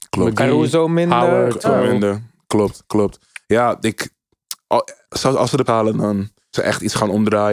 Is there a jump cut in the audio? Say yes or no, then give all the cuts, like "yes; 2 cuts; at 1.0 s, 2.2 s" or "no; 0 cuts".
yes; 3 cuts; at 1.6 s, 5.7 s, 6.5 s